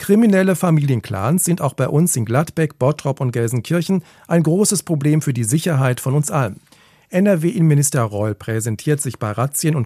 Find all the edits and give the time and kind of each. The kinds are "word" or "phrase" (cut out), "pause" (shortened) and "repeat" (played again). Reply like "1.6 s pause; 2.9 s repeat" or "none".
none